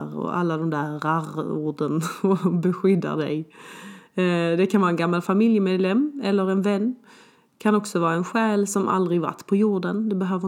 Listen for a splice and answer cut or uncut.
uncut